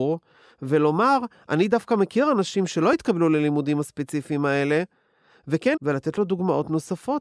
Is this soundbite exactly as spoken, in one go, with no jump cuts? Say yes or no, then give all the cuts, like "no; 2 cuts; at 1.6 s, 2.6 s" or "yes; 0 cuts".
no; 1 cut; at 5.7 s